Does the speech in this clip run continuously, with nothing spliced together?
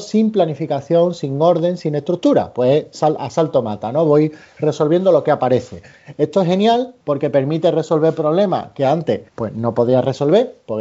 no; 2 cuts; at 7.0 s, 9.3 s

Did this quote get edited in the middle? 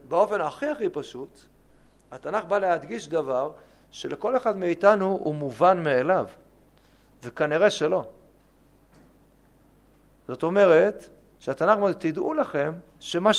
no; 0 cuts

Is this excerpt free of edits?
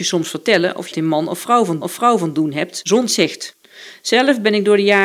no; 3 cuts; at 0.9 s, 1.8 s, 3.1 s

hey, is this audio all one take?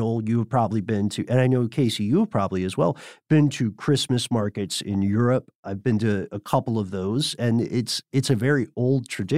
yes; 0 cuts

